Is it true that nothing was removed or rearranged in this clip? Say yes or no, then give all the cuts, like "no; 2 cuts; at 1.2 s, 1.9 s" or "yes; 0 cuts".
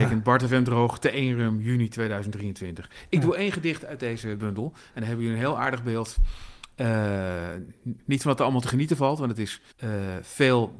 no; 1 cut; at 9.7 s